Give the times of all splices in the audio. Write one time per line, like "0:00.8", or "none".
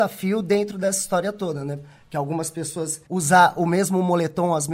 0:03.1